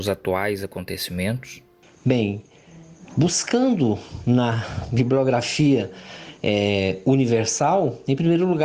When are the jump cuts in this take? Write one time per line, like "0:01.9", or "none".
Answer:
none